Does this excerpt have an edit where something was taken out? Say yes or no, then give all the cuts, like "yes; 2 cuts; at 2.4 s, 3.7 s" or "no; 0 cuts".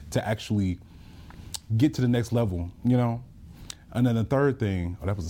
no; 0 cuts